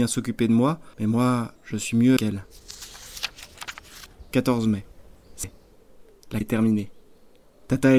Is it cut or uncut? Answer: cut